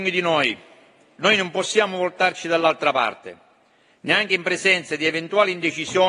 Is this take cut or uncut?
uncut